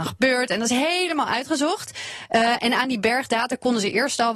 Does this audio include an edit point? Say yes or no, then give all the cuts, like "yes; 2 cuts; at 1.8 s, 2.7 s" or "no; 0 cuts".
no; 0 cuts